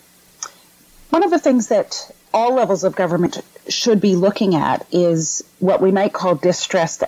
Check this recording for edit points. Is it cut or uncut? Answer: uncut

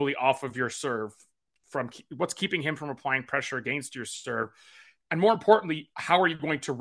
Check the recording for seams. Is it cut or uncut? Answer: uncut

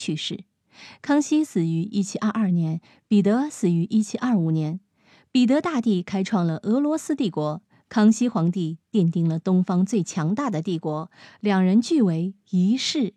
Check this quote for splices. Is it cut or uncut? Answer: uncut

